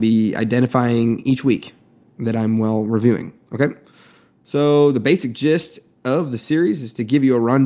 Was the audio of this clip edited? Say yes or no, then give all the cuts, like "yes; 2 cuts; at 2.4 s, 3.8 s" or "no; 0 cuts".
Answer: no; 0 cuts